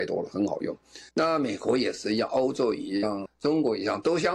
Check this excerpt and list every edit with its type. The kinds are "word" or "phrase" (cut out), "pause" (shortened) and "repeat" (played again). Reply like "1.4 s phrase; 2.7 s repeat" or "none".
1.1 s pause; 3.3 s word